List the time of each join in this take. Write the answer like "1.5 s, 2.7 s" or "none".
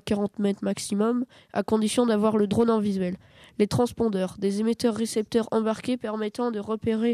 none